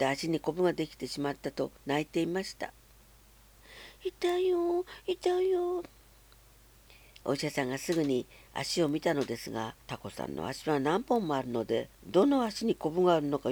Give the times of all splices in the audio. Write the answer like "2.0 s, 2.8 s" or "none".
1.8 s, 9.8 s, 11.9 s